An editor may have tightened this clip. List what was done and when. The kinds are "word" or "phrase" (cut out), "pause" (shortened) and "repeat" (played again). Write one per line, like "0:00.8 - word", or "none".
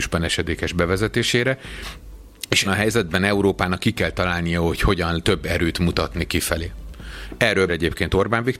0:02.6 - word
0:05.2 - word
0:07.7 - word